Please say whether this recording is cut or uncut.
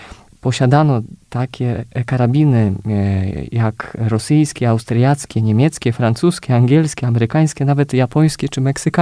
uncut